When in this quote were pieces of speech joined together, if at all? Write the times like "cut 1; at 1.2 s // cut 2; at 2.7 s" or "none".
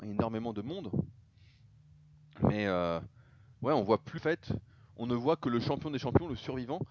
cut 1; at 4.2 s